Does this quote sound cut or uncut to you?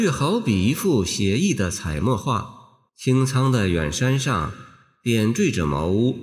cut